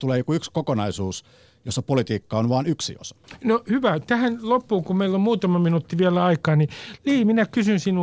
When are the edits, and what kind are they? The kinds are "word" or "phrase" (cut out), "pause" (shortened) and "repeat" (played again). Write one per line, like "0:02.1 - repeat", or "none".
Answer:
none